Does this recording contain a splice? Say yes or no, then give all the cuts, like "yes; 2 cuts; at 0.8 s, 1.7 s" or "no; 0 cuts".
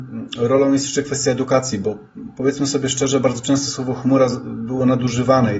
no; 0 cuts